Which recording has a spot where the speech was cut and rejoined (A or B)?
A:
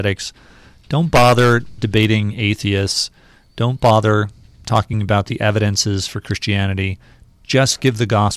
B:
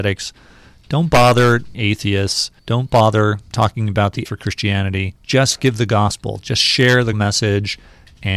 B